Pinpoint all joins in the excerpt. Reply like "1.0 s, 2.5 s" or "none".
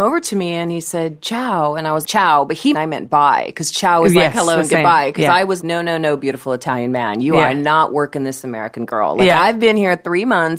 2.0 s, 2.7 s, 5.6 s